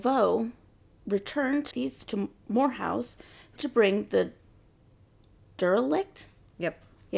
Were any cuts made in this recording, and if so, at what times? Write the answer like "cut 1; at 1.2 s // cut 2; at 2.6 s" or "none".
cut 1; at 1.7 s // cut 2; at 2.0 s // cut 3; at 3.6 s